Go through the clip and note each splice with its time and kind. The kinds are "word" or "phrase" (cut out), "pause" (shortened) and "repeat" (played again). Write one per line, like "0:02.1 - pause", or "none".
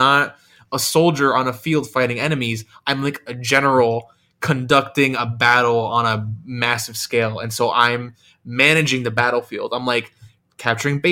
none